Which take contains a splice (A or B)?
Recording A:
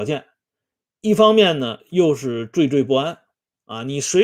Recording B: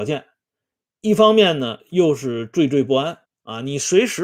B